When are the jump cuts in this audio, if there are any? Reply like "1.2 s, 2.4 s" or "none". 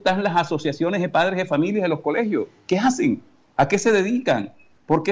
none